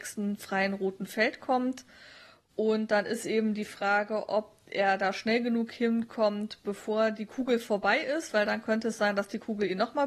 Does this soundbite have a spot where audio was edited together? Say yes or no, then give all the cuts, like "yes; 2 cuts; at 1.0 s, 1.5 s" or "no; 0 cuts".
no; 0 cuts